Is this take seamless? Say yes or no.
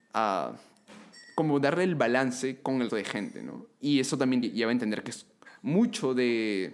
no